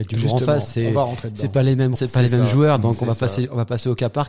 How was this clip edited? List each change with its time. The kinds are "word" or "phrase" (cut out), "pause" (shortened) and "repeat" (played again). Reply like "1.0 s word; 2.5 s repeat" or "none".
2.0 s word